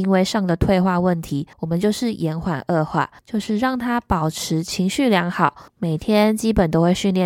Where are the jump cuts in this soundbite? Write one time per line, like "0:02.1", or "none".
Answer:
0:01.5
0:03.2
0:05.7